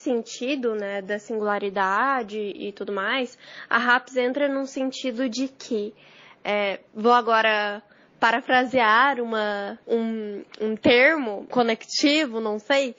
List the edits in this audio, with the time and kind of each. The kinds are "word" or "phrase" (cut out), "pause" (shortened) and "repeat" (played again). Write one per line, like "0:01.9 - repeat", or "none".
0:06.9 - pause
0:09.8 - pause
0:11.5 - word